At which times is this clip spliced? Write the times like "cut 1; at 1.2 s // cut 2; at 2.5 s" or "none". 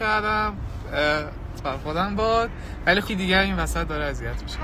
cut 1; at 1.6 s // cut 2; at 3.1 s